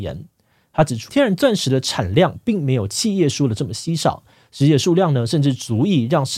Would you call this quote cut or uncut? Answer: cut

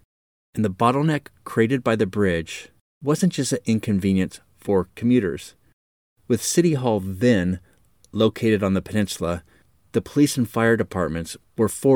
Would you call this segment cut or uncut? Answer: uncut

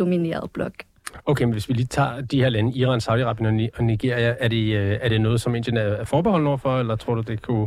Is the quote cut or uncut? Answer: uncut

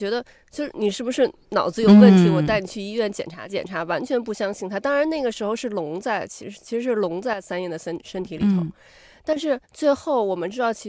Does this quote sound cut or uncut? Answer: cut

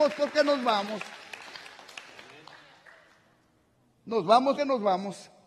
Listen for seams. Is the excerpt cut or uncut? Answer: cut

